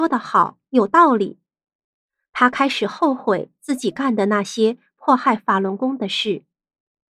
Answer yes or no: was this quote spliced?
no